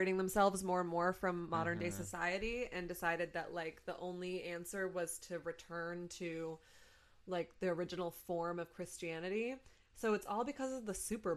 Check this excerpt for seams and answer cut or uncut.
uncut